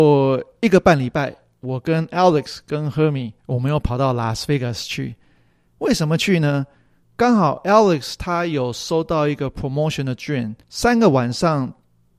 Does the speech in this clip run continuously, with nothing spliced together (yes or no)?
no